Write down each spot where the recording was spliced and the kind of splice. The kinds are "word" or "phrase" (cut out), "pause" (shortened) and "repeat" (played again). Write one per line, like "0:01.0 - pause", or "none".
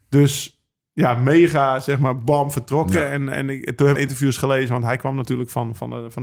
0:04.0 - phrase